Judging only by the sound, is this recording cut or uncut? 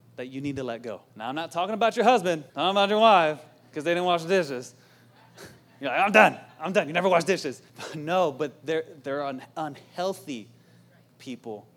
cut